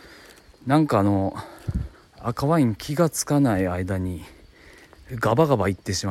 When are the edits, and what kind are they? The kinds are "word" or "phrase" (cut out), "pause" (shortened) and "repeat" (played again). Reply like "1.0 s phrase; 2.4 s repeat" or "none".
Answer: 1.9 s pause